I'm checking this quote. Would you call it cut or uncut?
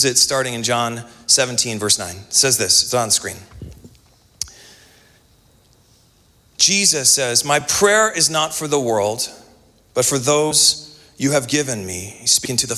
uncut